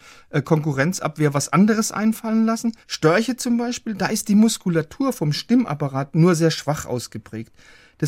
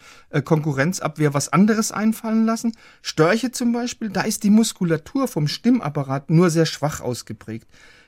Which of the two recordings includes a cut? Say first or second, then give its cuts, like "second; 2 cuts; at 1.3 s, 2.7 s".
first; 1 cut; at 2.8 s